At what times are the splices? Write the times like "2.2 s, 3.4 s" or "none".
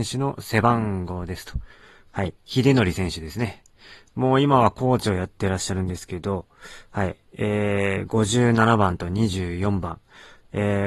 2.4 s